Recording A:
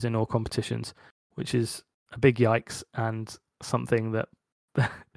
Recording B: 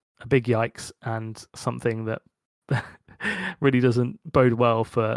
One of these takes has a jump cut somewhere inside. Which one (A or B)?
B